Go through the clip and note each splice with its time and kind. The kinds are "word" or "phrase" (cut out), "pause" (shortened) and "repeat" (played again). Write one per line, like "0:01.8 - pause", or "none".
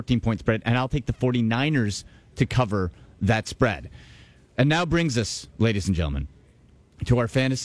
none